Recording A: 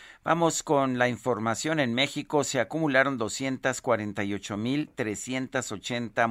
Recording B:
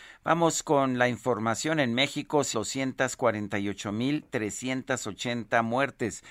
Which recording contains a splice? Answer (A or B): B